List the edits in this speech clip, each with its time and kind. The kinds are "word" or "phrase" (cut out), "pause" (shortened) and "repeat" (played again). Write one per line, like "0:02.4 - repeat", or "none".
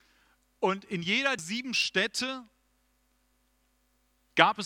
0:01.4 - word